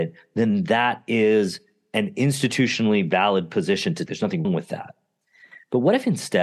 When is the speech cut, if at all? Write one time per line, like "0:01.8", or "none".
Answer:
0:04.1
0:04.4